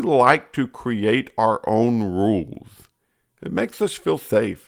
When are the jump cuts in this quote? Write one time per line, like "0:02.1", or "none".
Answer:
none